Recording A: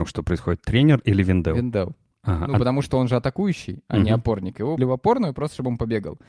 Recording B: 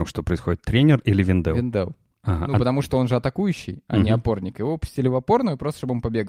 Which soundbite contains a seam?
A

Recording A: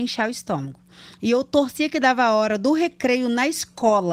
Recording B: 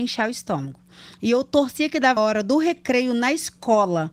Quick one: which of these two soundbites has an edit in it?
B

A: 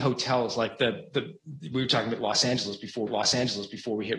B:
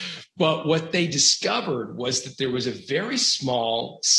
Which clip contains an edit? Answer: A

